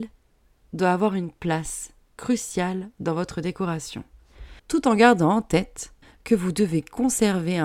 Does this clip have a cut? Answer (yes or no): yes